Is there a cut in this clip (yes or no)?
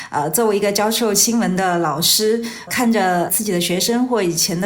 yes